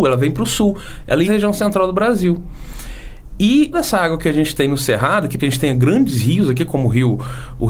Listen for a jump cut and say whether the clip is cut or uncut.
cut